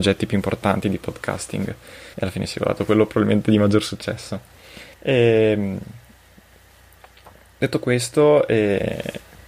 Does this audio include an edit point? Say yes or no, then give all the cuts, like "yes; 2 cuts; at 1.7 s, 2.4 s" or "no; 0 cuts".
yes; 2 cuts; at 2.1 s, 4.9 s